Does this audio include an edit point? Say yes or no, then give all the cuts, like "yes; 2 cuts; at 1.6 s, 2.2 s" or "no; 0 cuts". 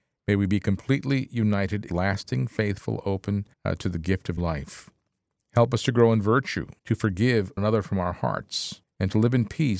yes; 6 cuts; at 1.9 s, 3.5 s, 4.4 s, 6.8 s, 7.6 s, 8.8 s